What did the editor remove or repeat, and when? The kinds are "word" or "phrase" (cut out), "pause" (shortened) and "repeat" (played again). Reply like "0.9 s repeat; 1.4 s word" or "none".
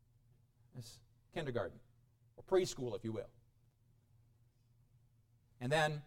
2.1 s pause